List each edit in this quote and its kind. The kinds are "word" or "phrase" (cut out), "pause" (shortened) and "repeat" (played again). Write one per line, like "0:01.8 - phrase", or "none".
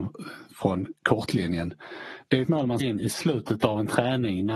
0:02.4 - word
0:02.8 - word